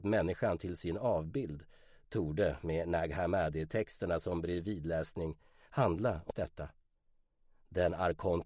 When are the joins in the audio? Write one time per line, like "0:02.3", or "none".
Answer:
none

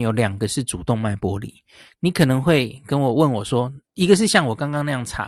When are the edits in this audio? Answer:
0:03.8

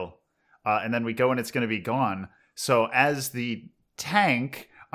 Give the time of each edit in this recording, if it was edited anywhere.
none

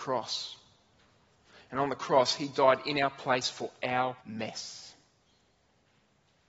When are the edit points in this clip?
0:04.2

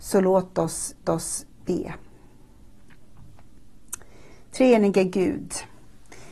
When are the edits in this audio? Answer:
0:01.0

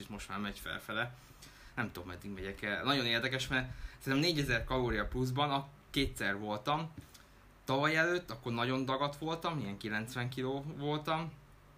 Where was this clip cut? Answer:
none

